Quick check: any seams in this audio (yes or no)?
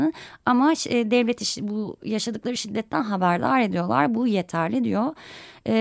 no